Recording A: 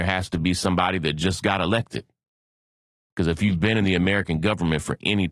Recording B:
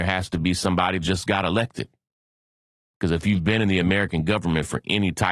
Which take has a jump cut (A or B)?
B